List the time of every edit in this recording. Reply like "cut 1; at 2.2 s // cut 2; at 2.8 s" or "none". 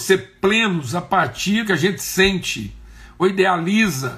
cut 1; at 1.6 s // cut 2; at 3.2 s

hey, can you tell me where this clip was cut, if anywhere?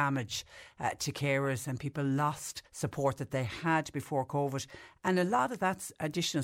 cut 1; at 2.7 s

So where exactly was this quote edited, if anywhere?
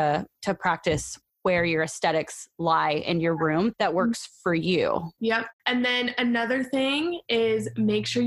none

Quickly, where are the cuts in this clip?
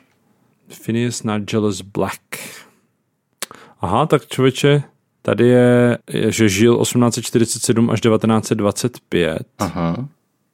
cut 1; at 6.0 s

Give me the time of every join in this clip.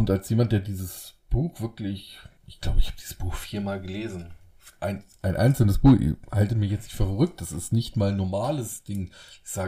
cut 1; at 2.4 s

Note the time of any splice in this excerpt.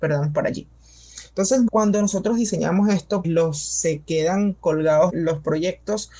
cut 1; at 1.7 s // cut 2; at 3.2 s // cut 3; at 5.1 s

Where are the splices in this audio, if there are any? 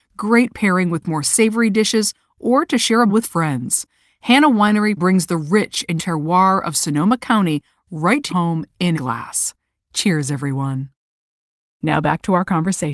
cut 1; at 3.1 s // cut 2; at 6.0 s // cut 3; at 8.3 s // cut 4; at 8.9 s

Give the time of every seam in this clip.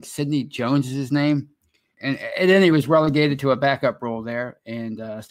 cut 1; at 1.9 s // cut 2; at 2.7 s

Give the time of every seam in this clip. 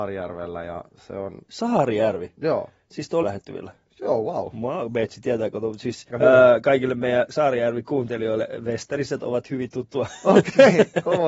cut 1; at 3.2 s // cut 2; at 6.1 s // cut 3; at 7.3 s

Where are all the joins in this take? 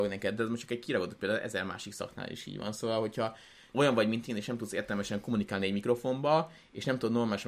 cut 1; at 3.7 s

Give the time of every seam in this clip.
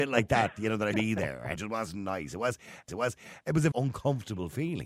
cut 1; at 0.9 s // cut 2; at 1.6 s // cut 3; at 2.9 s // cut 4; at 3.7 s

